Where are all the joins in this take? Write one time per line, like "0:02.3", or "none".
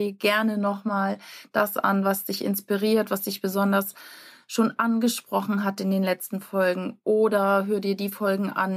none